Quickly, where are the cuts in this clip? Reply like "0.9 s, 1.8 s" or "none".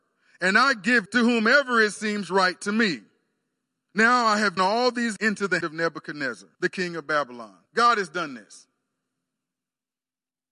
1.1 s, 3.6 s, 4.6 s, 5.2 s, 5.6 s, 6.5 s, 7.7 s